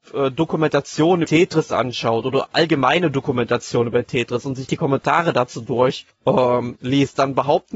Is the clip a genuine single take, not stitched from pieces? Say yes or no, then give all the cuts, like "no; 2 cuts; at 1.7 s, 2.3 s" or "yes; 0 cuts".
no; 2 cuts; at 1.2 s, 6.1 s